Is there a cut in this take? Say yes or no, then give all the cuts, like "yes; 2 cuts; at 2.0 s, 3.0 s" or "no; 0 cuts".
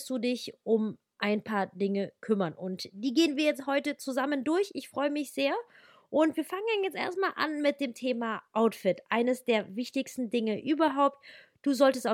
no; 0 cuts